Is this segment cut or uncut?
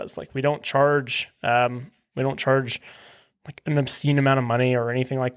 uncut